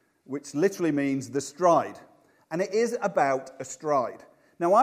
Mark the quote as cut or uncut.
uncut